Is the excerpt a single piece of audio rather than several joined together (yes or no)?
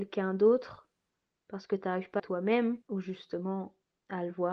no